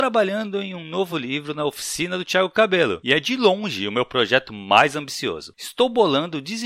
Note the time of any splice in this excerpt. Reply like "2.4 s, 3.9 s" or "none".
none